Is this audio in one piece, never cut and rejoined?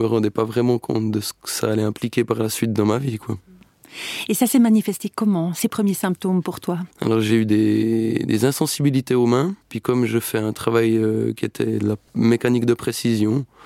no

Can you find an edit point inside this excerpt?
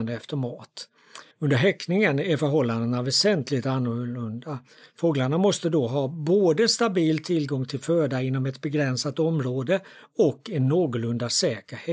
yes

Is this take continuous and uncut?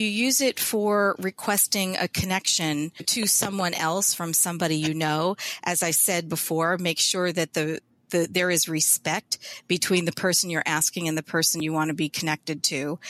yes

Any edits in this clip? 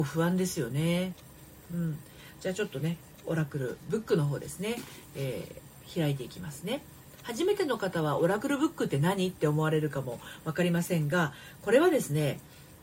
no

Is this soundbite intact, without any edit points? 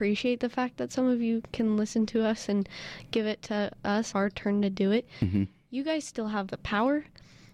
no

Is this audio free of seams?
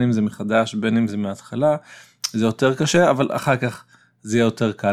yes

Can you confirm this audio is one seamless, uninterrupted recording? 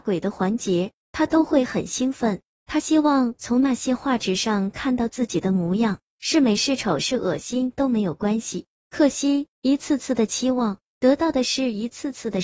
no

